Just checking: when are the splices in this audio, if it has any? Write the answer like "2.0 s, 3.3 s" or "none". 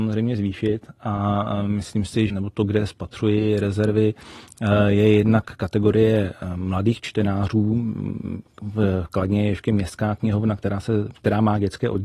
2.3 s